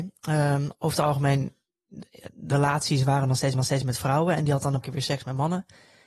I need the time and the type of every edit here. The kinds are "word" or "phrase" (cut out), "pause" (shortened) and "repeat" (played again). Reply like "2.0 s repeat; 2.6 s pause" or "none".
2.5 s word; 3.5 s repeat; 4.8 s word